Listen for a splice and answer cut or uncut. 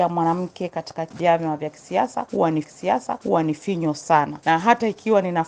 cut